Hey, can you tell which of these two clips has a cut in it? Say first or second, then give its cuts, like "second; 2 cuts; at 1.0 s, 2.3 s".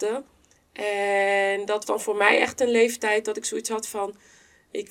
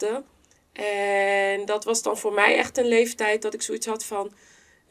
first; 1 cut; at 1.8 s